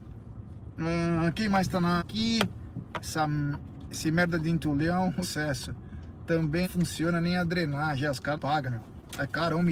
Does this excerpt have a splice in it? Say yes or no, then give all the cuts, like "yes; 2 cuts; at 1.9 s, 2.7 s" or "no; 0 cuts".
yes; 5 cuts; at 2.0 s, 5.2 s, 6.6 s, 8.3 s, 8.7 s